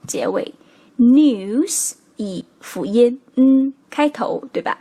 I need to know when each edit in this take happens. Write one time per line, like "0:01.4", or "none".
0:03.8